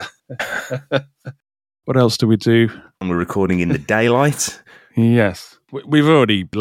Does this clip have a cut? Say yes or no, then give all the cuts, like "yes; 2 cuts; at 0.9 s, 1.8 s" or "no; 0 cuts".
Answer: no; 0 cuts